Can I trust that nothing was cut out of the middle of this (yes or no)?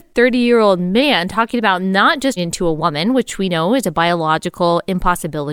no